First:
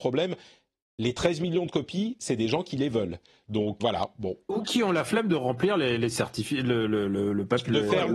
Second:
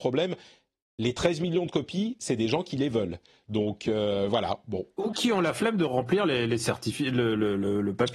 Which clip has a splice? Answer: first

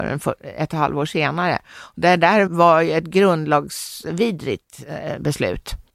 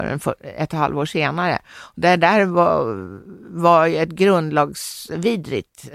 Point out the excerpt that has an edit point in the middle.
first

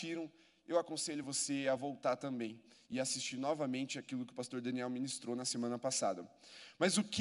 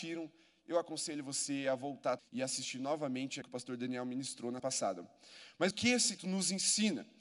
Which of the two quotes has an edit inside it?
second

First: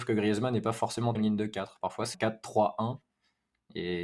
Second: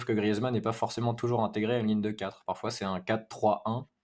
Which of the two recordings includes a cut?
first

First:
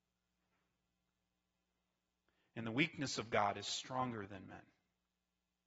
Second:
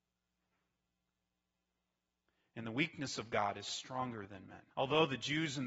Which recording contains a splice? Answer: second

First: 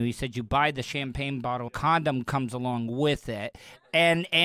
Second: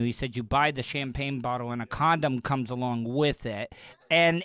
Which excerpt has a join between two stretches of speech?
first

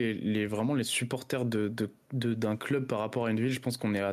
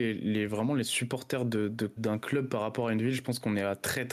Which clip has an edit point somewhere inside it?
second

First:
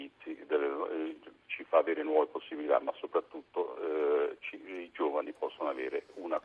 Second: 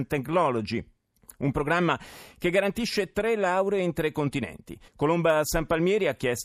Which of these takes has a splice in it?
second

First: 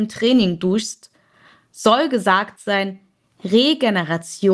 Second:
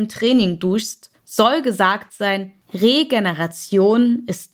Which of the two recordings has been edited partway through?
second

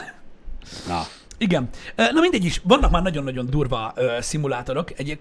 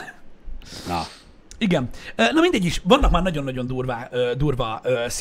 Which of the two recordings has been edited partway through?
first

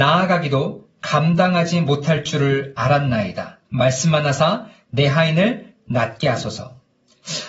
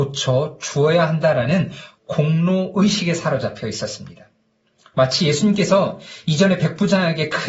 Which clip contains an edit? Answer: first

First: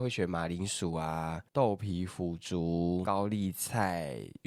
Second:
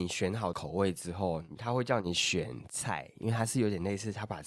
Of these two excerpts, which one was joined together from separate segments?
first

